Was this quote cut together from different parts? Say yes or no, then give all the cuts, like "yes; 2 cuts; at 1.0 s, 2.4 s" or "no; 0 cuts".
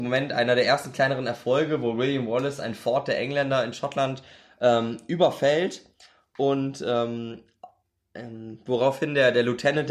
no; 0 cuts